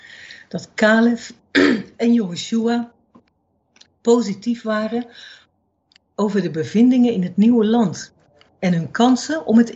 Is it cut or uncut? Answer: uncut